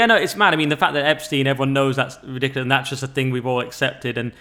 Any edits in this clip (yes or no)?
no